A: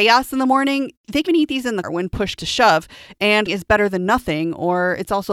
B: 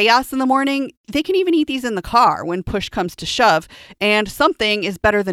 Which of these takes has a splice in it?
A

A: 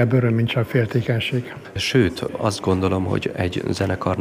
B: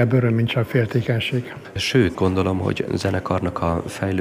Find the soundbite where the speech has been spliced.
B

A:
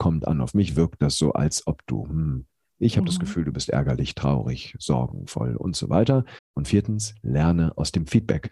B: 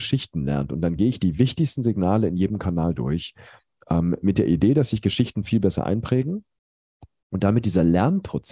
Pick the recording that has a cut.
A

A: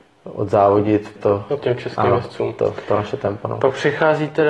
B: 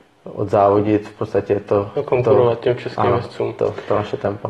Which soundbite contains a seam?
A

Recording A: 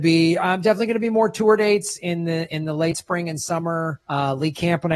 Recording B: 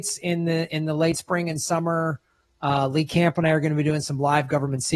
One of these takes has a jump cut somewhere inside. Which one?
A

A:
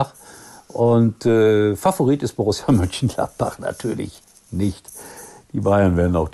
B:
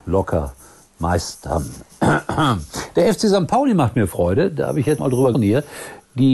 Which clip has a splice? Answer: B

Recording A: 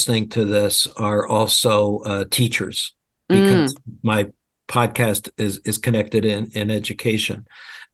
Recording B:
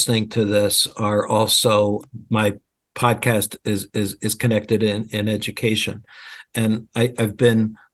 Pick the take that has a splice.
B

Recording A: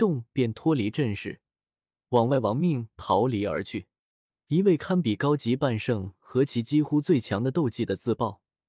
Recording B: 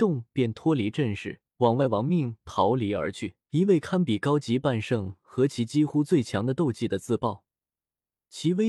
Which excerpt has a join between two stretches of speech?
B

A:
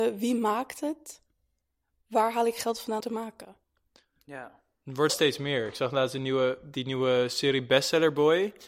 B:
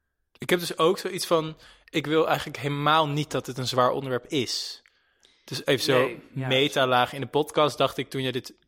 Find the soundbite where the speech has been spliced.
A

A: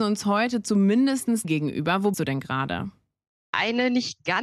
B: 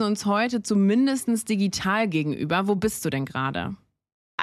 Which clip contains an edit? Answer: A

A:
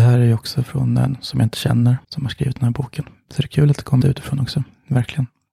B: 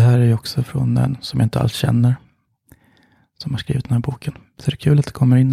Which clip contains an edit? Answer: A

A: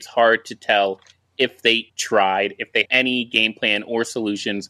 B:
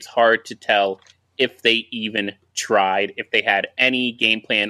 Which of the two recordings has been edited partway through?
A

